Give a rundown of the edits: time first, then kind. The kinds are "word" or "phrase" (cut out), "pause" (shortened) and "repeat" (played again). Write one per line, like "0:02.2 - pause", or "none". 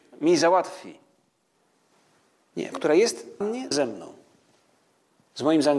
0:02.7 - word
0:03.4 - word
0:03.7 - phrase